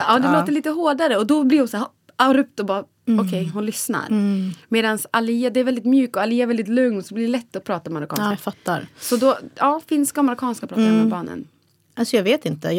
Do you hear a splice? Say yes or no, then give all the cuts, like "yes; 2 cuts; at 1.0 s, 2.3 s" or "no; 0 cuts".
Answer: yes; 1 cut; at 8.3 s